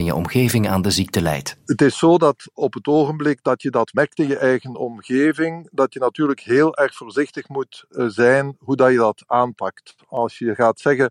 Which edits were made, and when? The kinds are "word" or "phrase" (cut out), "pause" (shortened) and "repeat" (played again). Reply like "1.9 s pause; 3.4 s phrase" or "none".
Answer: none